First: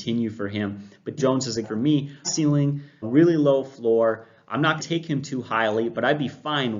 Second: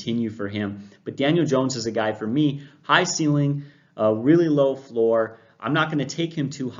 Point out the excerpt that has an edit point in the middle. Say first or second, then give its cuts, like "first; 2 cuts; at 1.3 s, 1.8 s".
first; 5 cuts; at 1.2 s, 1.6 s, 2.2 s, 3.0 s, 4.8 s